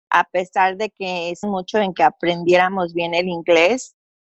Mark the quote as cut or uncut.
cut